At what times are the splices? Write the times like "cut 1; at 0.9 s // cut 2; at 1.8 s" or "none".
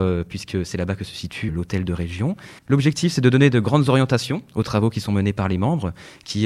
cut 1; at 1.5 s // cut 2; at 2.6 s